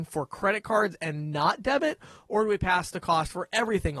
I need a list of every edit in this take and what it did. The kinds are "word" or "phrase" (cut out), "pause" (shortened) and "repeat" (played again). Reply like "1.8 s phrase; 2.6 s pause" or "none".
none